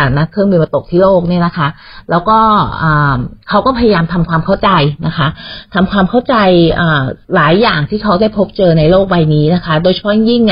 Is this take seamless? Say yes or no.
no